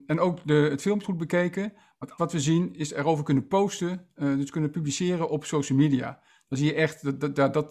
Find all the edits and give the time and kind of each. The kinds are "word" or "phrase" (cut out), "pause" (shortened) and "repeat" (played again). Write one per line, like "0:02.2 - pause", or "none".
0:01.0 - word
0:02.2 - word